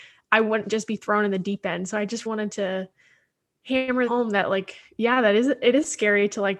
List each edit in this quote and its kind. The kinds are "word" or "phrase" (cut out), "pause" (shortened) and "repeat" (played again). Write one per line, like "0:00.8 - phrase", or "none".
0:02.3 - word
0:04.1 - word